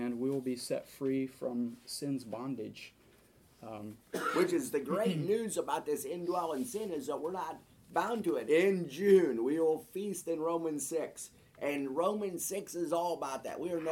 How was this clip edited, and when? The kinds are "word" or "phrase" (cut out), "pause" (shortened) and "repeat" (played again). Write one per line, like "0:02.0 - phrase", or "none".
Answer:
0:04.0 - pause
0:08.4 - word